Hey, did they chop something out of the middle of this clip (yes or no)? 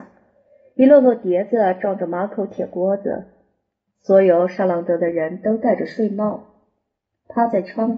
no